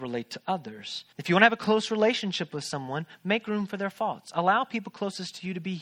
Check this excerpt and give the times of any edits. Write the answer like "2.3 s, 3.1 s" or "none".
1.1 s